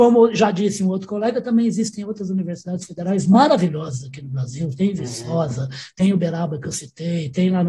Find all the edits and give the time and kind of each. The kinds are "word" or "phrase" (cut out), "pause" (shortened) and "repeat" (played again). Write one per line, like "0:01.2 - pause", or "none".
none